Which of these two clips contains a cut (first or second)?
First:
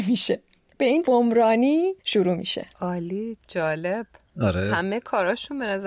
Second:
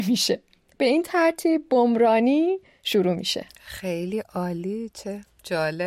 first